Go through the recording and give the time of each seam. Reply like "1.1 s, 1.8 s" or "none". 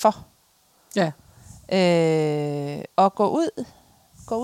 2.9 s